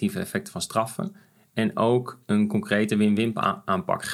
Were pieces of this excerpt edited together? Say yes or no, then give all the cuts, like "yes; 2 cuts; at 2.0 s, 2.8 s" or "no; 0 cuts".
no; 0 cuts